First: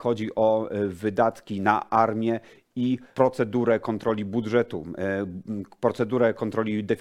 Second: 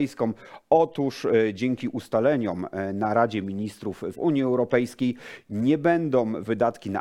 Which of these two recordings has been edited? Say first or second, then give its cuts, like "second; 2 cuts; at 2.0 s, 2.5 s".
second; 1 cut; at 4.1 s